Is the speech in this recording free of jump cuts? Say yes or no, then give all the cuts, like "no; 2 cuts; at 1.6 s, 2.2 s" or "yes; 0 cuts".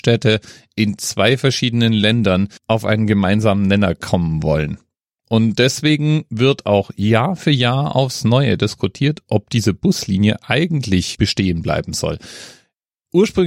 no; 2 cuts; at 2.6 s, 11.1 s